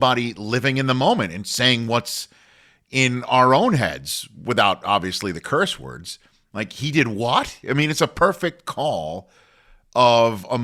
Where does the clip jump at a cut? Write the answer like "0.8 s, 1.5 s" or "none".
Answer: none

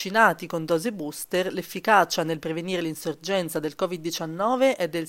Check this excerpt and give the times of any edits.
none

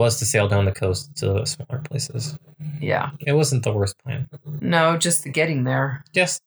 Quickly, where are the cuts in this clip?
none

